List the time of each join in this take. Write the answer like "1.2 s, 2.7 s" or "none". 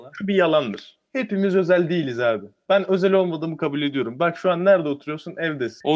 1.0 s